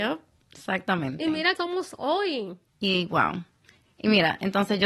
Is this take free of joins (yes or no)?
no